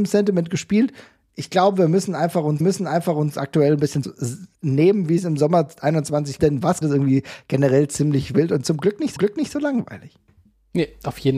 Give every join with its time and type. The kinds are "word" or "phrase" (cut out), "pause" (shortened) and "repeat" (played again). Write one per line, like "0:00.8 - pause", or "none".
0:02.6 - repeat
0:04.0 - phrase
0:04.5 - pause
0:06.4 - word
0:06.8 - phrase
0:09.2 - repeat